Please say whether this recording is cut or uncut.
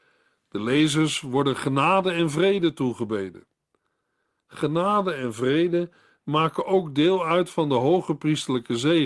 uncut